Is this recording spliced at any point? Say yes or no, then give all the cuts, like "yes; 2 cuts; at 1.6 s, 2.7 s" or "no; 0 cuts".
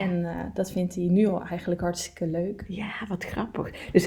no; 0 cuts